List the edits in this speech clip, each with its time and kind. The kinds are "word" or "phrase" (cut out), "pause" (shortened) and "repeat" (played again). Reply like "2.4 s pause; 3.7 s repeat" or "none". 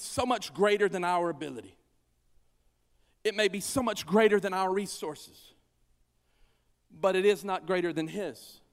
none

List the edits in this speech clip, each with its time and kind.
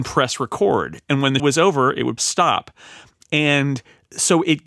1.4 s word; 2.2 s word

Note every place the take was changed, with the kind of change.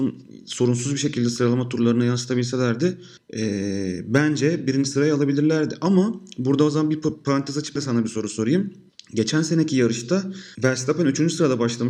3.2 s pause; 7.8 s word; 8.9 s pause; 10.5 s pause

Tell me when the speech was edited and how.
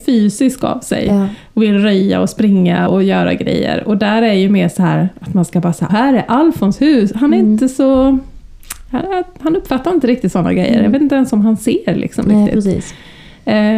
2.9 s word; 5.9 s word

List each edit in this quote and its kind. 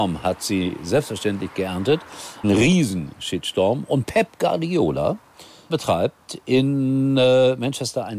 2.4 s word; 5.7 s word

